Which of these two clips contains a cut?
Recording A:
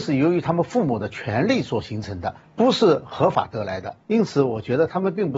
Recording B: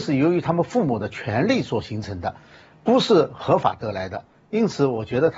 A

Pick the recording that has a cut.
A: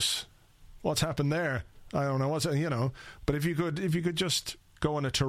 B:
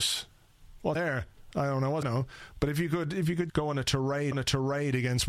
B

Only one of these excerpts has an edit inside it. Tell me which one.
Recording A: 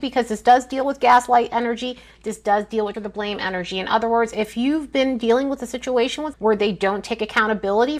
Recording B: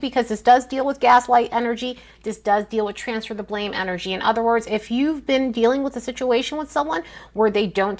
A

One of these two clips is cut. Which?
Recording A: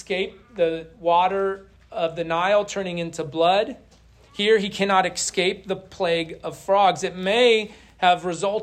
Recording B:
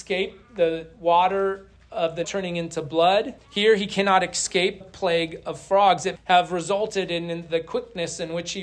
B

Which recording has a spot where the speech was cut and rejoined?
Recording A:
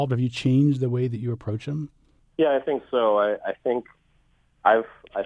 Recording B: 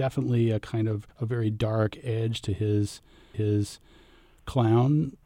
B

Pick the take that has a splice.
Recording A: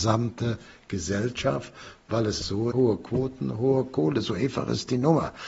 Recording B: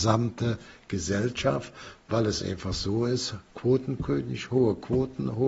A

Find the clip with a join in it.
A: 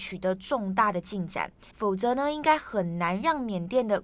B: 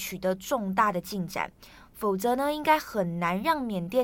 A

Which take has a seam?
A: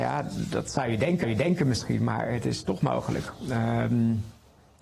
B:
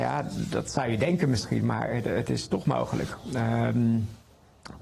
A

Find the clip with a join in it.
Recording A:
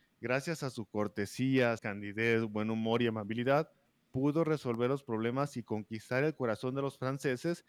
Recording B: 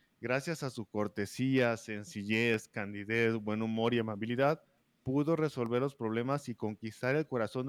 A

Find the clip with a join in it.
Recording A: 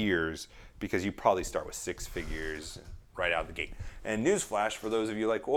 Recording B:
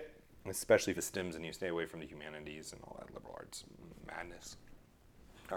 B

